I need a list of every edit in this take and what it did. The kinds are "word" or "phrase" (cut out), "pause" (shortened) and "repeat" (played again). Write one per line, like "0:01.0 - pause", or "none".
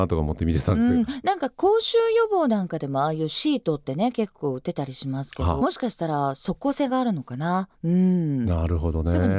0:05.6 - phrase
0:07.7 - pause